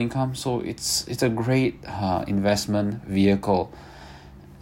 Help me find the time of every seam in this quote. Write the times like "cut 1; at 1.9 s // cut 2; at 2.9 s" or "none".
none